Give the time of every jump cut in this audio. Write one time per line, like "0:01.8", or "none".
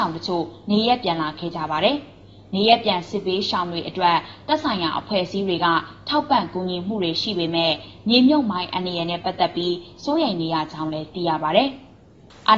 none